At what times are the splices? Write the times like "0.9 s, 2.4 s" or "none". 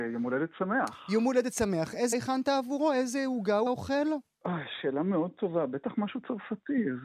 2.1 s, 3.7 s